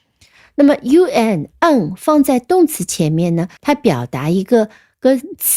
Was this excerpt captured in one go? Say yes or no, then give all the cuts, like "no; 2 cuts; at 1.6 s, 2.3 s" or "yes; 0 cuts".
no; 1 cut; at 3.6 s